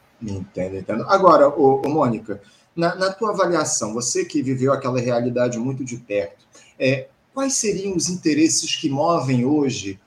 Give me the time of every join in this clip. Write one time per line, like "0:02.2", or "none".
none